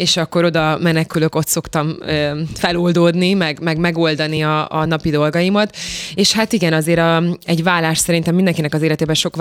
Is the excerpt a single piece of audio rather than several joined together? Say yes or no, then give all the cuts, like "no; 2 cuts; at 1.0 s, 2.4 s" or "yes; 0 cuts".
yes; 0 cuts